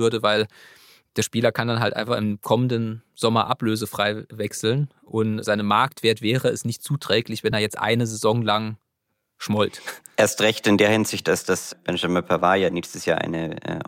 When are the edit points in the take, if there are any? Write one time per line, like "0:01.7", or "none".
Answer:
none